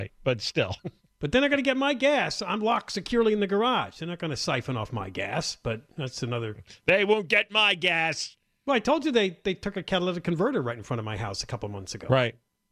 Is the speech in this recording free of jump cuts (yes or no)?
yes